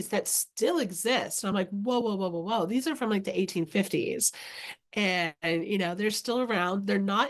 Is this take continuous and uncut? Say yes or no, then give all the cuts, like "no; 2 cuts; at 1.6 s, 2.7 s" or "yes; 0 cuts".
yes; 0 cuts